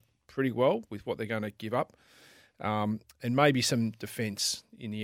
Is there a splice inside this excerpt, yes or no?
no